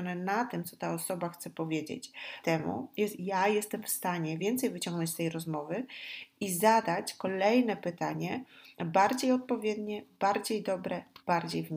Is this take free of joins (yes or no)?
no